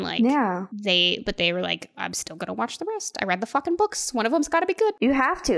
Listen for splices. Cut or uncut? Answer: uncut